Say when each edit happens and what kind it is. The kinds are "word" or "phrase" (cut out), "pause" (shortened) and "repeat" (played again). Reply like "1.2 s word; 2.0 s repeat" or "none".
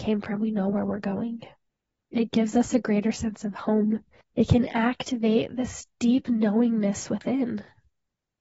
1.7 s pause; 4.2 s pause